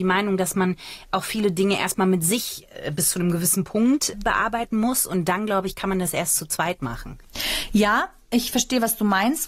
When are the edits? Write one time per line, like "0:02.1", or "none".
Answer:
none